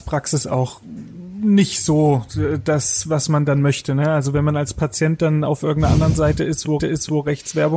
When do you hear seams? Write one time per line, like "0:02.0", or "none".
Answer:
0:06.8